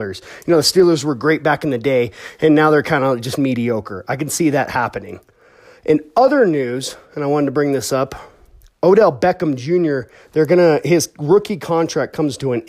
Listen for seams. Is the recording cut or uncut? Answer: uncut